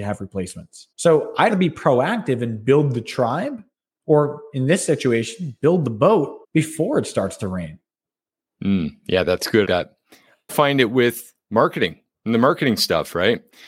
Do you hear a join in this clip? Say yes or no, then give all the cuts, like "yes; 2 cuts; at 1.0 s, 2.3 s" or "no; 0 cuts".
yes; 6 cuts; at 0.9 s, 1.5 s, 3.7 s, 6.4 s, 9.6 s, 10.5 s